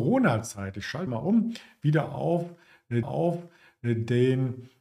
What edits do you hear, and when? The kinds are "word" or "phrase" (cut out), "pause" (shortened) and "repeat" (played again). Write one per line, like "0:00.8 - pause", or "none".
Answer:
0:01.1 - phrase
0:03.0 - repeat